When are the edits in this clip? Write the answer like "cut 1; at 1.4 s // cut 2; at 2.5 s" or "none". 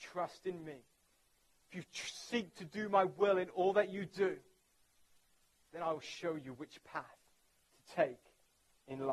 none